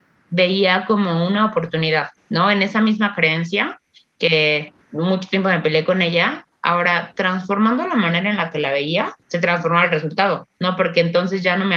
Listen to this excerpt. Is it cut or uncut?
cut